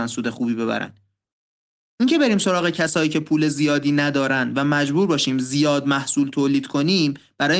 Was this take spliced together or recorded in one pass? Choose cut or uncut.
uncut